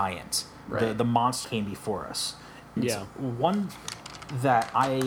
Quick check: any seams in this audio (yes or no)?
yes